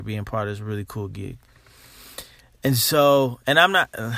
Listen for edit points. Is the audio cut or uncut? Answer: uncut